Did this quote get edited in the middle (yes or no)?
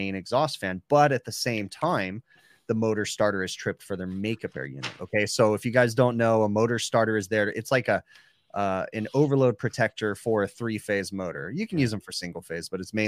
no